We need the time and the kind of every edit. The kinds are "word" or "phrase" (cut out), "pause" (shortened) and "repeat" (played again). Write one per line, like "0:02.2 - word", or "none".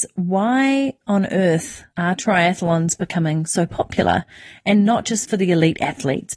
0:01.9 - pause

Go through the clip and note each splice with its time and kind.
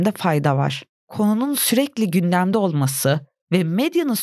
none

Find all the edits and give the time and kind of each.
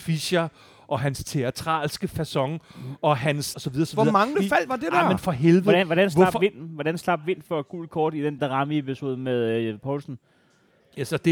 0:03.5 - word
0:04.3 - word
0:08.4 - word

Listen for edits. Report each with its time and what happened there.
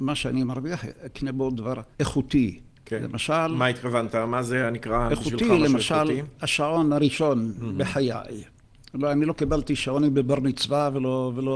0:01.9 - pause

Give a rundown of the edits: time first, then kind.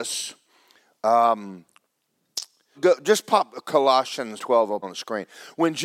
0:02.7 - word
0:04.4 - word
0:04.8 - word

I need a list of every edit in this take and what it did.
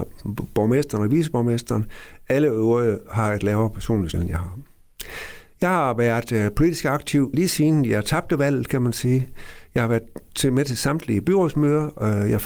0:04.1 - word
0:07.3 - word

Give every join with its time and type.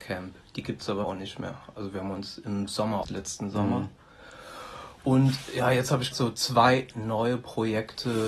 0:01.0 - word
0:03.0 - word
0:06.1 - word

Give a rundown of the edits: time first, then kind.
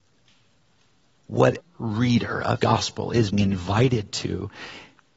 0:01.6 - word
0:02.6 - word
0:03.3 - word

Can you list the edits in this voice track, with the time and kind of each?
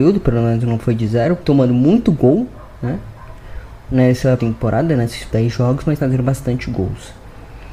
0:01.4 - word
0:04.4 - phrase
0:05.3 - word
0:06.0 - word

